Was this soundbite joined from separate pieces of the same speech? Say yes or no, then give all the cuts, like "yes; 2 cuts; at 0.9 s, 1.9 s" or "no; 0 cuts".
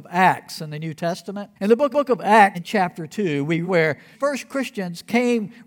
yes; 5 cuts; at 1.6 s, 1.9 s, 2.5 s, 3.6 s, 4.1 s